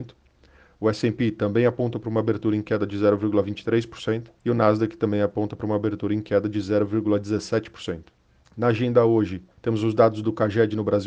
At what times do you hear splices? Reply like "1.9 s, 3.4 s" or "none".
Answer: 4.4 s, 8.3 s, 9.5 s